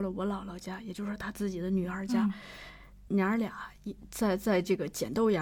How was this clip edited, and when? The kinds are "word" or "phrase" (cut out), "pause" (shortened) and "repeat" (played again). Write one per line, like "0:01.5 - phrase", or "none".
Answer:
0:03.1 - word